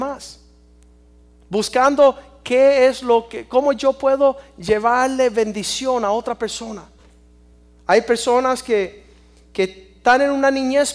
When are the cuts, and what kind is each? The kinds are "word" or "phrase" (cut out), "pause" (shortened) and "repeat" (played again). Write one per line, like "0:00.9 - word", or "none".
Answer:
none